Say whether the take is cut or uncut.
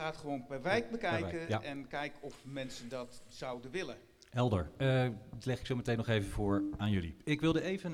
uncut